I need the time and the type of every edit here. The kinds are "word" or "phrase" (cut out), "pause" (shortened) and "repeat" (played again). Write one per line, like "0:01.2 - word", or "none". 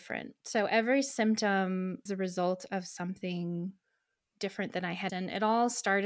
0:02.1 - word
0:05.1 - word